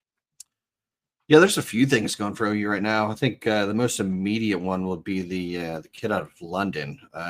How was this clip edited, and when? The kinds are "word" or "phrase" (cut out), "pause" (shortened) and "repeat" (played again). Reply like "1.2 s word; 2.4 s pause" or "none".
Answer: none